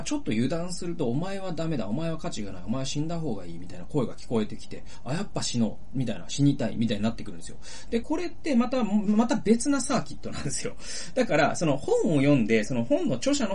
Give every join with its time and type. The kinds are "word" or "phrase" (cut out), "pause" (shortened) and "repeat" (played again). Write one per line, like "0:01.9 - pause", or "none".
0:08.0 - phrase